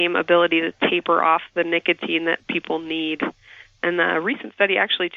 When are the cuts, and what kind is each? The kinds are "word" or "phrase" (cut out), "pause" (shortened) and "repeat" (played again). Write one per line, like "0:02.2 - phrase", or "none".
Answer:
none